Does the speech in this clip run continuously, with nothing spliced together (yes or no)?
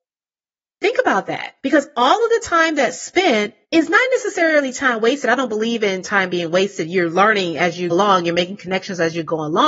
no